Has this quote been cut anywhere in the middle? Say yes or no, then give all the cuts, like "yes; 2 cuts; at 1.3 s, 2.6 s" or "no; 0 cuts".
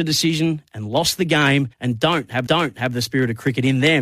yes; 2 cuts; at 1.7 s, 2.5 s